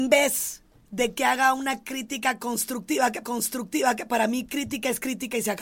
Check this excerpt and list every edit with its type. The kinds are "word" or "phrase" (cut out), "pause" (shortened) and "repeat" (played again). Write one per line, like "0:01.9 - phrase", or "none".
0:03.2 - repeat